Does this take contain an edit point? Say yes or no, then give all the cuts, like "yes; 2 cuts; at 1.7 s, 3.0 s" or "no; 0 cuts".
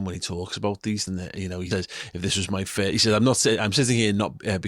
yes; 2 cuts; at 1.1 s, 1.7 s